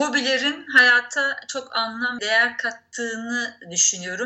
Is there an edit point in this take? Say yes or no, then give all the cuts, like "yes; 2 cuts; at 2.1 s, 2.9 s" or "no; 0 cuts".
yes; 1 cut; at 2.2 s